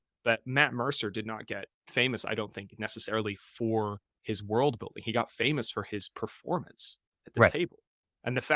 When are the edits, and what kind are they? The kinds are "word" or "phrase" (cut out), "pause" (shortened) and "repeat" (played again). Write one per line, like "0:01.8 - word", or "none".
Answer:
0:01.8 - pause